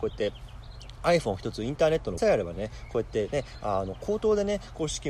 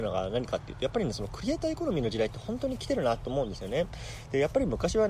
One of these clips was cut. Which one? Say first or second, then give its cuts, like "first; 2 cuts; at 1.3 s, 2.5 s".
first; 1 cut; at 2.2 s